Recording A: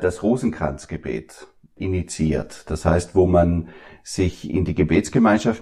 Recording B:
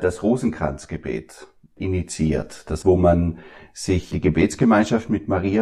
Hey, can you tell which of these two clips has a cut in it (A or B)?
B